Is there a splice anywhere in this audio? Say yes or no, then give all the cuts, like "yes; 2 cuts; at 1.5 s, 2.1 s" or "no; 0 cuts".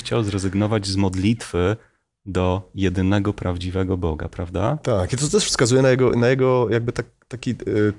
no; 0 cuts